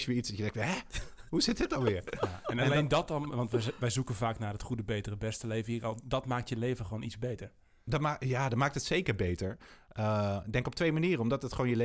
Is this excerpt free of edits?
yes; 0 cuts

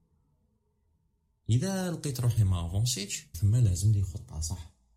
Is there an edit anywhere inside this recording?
yes; 1 cut; at 3.3 s

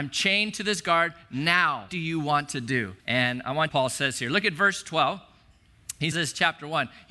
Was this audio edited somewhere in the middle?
yes; 4 cuts; at 1.9 s, 3.0 s, 3.7 s, 6.1 s

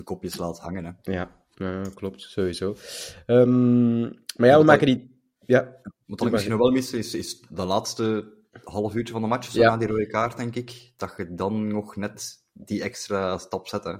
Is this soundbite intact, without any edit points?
no; 1 cut; at 1.0 s

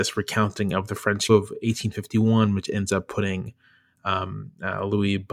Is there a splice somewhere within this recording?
yes; 1 cut; at 1.3 s

